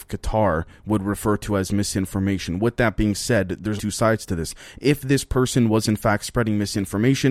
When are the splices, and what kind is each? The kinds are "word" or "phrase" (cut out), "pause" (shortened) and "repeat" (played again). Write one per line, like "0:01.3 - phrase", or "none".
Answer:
0:03.8 - word